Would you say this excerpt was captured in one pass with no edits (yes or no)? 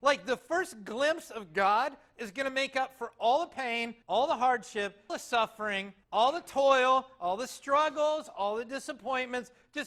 no